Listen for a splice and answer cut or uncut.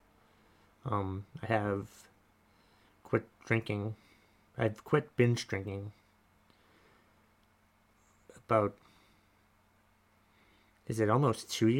uncut